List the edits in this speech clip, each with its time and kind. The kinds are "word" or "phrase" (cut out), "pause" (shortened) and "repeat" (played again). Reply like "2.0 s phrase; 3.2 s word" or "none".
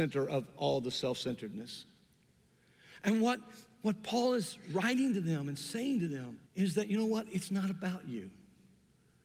6.5 s pause